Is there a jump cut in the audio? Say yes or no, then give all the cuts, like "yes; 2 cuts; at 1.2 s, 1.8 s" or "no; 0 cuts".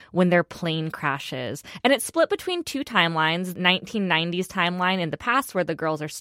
yes; 1 cut; at 3.6 s